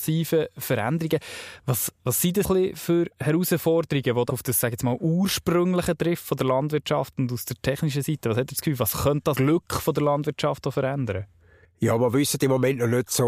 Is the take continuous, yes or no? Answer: no